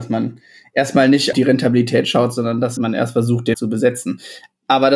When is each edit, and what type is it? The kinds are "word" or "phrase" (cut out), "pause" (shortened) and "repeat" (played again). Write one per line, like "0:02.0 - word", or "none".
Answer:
0:01.3 - word
0:02.8 - word
0:03.5 - word

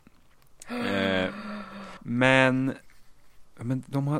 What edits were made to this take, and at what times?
0:02.0 - pause

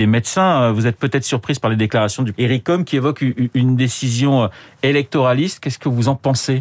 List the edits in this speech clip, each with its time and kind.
0:02.3 - word

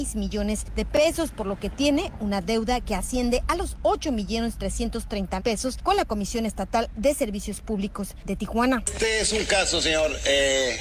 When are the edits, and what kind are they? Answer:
0:05.4 - word

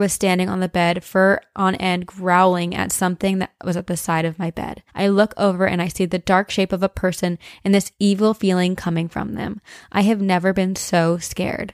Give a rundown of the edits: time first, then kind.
0:04.9 - pause

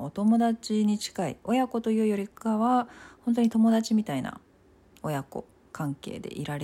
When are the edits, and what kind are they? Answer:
none

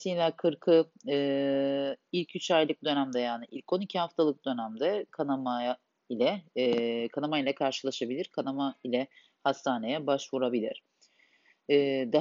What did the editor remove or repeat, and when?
none

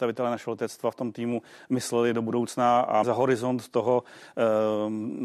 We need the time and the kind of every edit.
0:03.0 - word

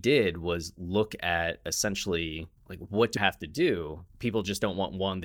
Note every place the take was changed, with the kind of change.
0:02.6 - pause
0:03.2 - word
0:04.1 - pause

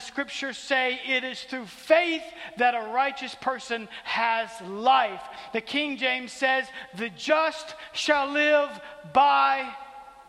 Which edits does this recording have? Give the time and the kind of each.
none

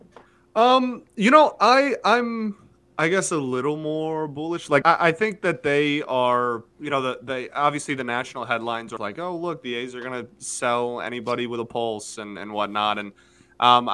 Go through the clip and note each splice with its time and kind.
0:02.7 - pause
0:04.8 - word
0:06.7 - pause
0:09.0 - word

